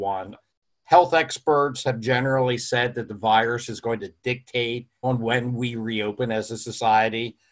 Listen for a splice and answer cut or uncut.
cut